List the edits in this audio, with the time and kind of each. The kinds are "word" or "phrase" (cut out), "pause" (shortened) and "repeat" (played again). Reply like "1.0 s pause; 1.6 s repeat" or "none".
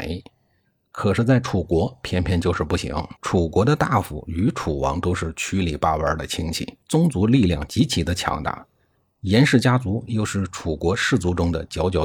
3.2 s pause; 6.8 s pause